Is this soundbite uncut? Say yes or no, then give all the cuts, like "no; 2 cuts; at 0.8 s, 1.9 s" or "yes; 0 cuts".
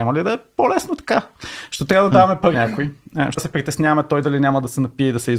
no; 2 cuts; at 2.5 s, 3.4 s